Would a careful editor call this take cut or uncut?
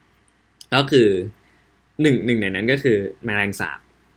uncut